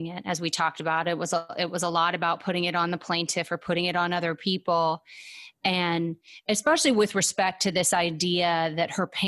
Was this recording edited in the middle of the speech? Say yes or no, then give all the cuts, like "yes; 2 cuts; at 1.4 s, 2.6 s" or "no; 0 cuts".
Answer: no; 0 cuts